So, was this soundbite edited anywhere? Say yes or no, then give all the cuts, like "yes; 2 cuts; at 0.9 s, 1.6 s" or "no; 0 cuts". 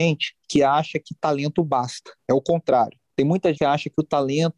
yes; 1 cut; at 3.5 s